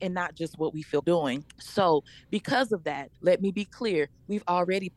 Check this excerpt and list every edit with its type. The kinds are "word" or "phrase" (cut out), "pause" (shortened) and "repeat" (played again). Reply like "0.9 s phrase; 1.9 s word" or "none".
1.0 s word; 1.5 s pause; 3.1 s pause

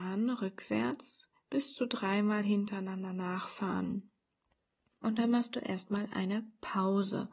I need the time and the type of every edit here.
none

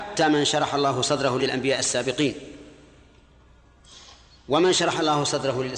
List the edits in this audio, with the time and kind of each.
1.4 s phrase

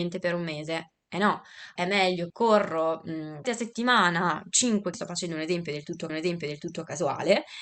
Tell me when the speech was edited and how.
1.8 s word; 2.3 s word; 3.4 s phrase; 4.9 s word; 6.1 s repeat

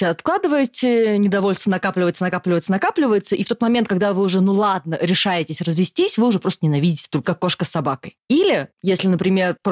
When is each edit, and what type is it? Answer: 7.2 s phrase

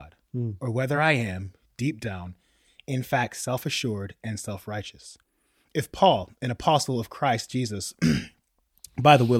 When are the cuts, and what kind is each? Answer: none

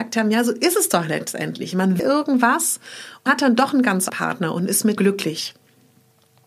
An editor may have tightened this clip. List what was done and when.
2.0 s word; 3.3 s word; 4.1 s word; 5.0 s word

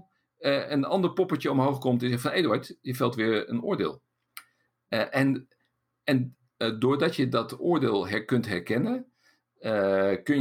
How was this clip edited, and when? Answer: none

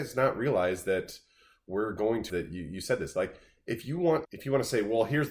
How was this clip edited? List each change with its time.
2.3 s word; 4.2 s word

